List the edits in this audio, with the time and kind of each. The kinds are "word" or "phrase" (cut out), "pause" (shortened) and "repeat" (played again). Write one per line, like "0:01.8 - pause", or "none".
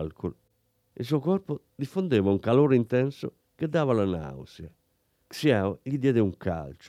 none